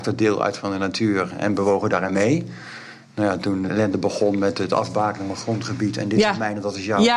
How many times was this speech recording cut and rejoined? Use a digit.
1